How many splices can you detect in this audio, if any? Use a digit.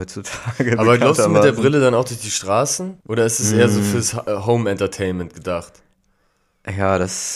1